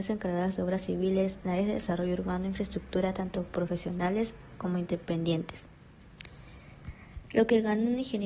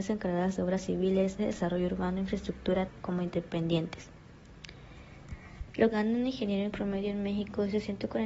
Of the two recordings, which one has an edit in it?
second; 4 cuts; at 1.4 s, 2.9 s, 5.9 s, 6.7 s

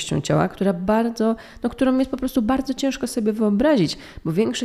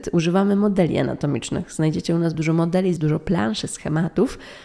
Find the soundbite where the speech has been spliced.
second; 2 cuts; at 2.3 s, 3.0 s

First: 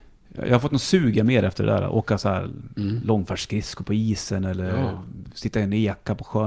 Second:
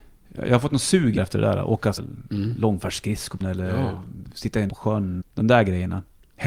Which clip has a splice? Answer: second; 5 cuts; at 1.2 s, 2.0 s, 3.4 s, 4.7 s, 5.2 s

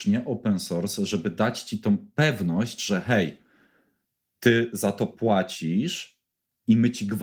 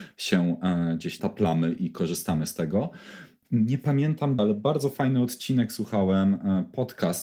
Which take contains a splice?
second; 3 cuts; at 1.2 s, 3.4 s, 4.4 s

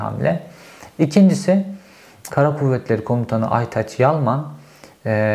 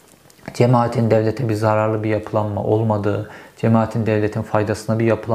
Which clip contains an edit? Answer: first; 1 cut; at 2.3 s

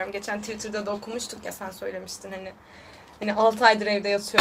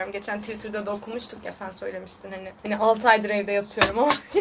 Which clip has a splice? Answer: second; 1 cut; at 2.6 s

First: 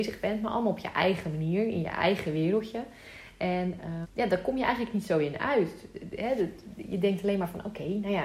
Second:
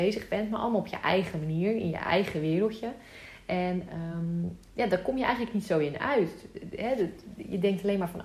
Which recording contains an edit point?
first; 1 cut; at 4.0 s

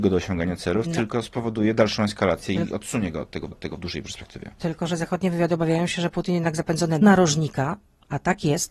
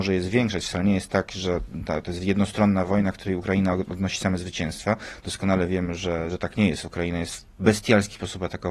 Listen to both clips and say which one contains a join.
first; 2 cuts; at 3.5 s, 7.0 s

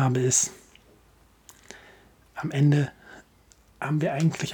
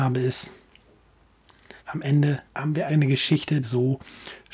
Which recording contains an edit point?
second; 4 cuts; at 1.8 s, 2.5 s, 2.9 s, 3.6 s

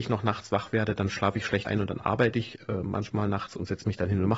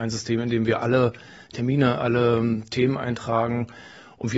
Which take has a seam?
first; 1 cut; at 1.6 s

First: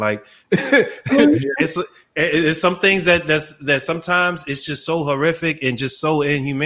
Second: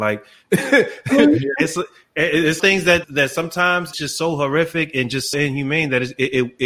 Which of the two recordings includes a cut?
second; 4 cuts; at 2.6 s, 3.0 s, 3.9 s, 5.3 s

